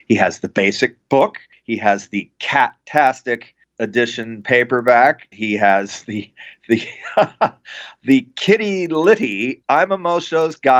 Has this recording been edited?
yes; 1 cut; at 5.3 s

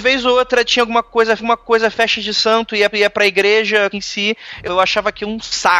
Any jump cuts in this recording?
yes; 4 cuts; at 1.4 s, 2.9 s, 3.9 s, 4.6 s

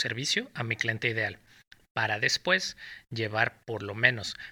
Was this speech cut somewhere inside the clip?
no; 0 cuts

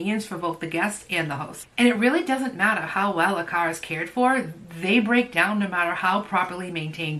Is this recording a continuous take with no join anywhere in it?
yes; 0 cuts

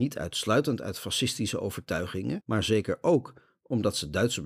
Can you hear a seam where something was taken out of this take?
no; 0 cuts

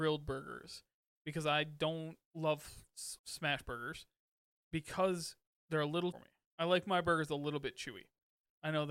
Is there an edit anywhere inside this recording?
yes; 2 cuts; at 3.2 s, 6.1 s

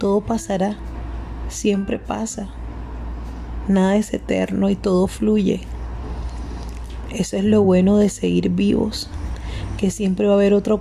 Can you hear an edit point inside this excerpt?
no; 0 cuts

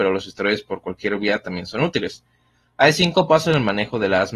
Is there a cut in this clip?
no; 0 cuts

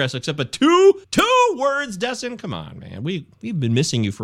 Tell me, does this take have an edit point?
yes; 1 cut; at 1.0 s

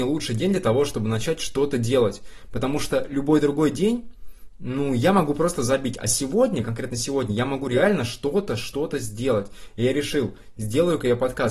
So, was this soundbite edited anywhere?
no; 0 cuts

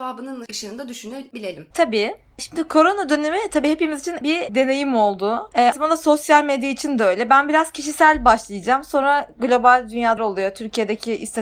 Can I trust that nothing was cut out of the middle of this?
no; 4 cuts; at 1.7 s, 4.2 s, 5.7 s, 10.2 s

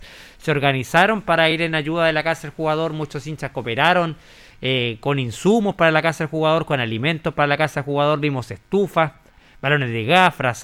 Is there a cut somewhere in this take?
no; 0 cuts

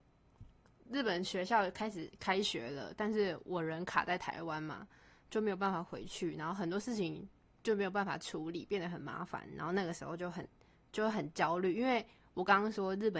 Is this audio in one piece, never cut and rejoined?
yes; 0 cuts

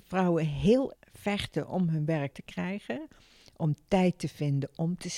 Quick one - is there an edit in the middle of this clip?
yes; 2 cuts; at 0.9 s, 2.3 s

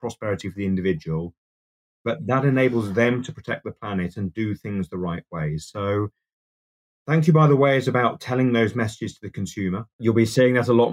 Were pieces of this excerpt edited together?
no; 0 cuts

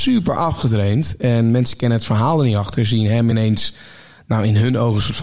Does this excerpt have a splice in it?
no; 0 cuts

